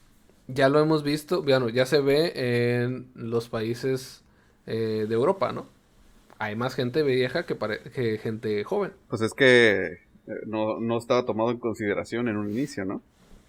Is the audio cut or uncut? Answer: uncut